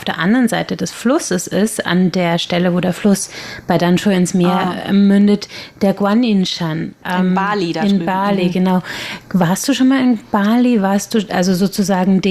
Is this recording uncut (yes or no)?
no